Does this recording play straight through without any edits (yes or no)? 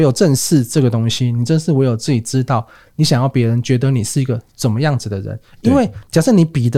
yes